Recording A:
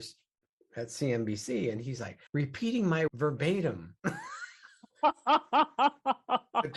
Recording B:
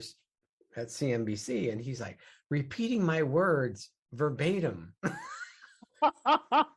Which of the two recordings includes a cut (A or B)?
A